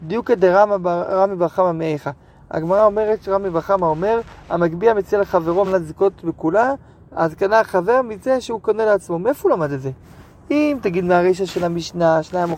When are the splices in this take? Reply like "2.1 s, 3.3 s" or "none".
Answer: none